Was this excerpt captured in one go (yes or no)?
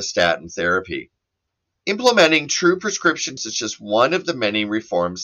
no